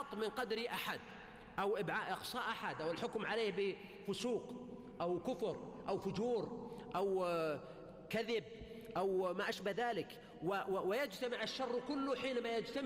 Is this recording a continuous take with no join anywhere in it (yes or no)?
yes